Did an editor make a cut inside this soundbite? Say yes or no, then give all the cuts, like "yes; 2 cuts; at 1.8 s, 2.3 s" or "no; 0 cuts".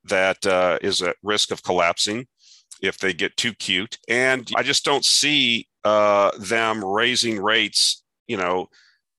yes; 2 cuts; at 4.0 s, 4.5 s